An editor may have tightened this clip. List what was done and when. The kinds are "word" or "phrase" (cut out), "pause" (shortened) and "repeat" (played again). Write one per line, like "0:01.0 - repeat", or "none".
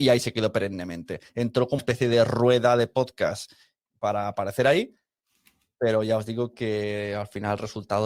0:01.8 - word